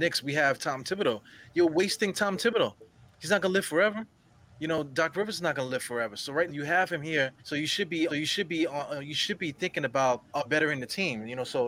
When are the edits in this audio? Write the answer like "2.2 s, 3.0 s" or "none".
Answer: 6.5 s, 7.4 s, 8.1 s, 10.3 s